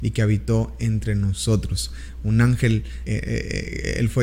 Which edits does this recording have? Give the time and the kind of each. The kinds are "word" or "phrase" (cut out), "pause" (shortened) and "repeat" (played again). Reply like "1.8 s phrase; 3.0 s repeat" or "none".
3.1 s word